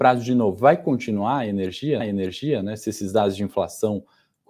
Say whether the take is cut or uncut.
cut